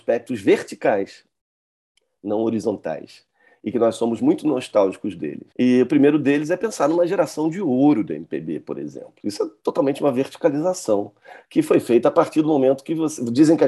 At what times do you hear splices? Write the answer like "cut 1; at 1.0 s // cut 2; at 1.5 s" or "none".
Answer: cut 1; at 5.5 s